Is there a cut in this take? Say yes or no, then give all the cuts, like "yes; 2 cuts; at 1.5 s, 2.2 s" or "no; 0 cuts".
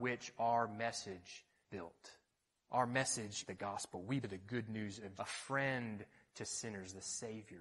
yes; 5 cuts; at 1.7 s, 2.4 s, 3.5 s, 4.2 s, 5.2 s